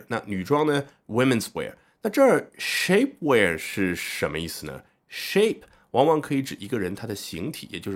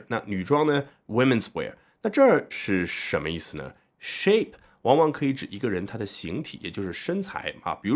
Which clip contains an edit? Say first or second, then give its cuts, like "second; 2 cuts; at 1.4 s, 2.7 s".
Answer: second; 1 cut; at 2.5 s